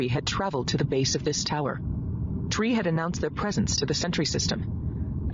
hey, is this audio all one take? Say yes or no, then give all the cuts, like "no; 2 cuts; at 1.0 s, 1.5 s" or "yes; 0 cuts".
yes; 0 cuts